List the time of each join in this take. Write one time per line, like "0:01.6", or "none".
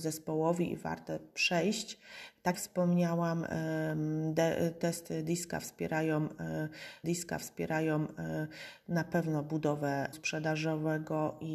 0:02.5
0:07.0
0:10.1